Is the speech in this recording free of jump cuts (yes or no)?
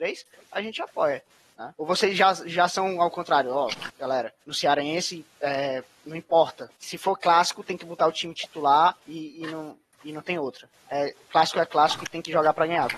no